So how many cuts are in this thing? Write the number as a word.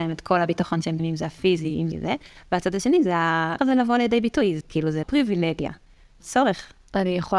six